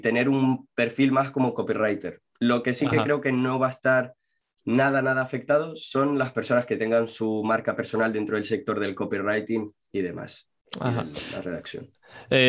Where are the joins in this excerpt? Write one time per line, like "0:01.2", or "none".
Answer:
none